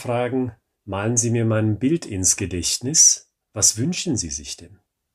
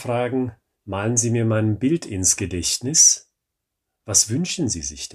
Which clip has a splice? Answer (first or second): first